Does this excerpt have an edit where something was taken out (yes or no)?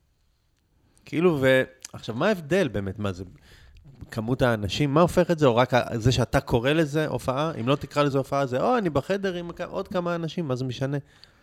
no